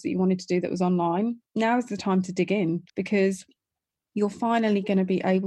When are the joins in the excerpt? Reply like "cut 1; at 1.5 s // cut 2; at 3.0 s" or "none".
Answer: cut 1; at 1.5 s // cut 2; at 2.9 s